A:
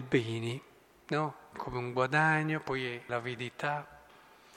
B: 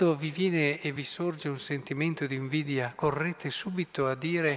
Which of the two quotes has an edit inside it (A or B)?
A